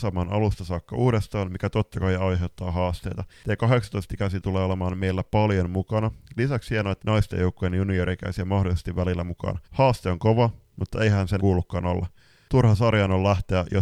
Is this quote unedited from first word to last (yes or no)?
no